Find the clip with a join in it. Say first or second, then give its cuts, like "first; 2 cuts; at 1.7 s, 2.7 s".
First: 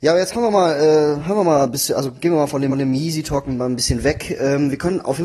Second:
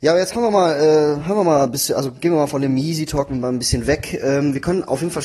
first; 1 cut; at 2.7 s